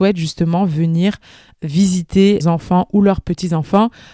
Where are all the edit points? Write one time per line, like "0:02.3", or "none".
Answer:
0:02.4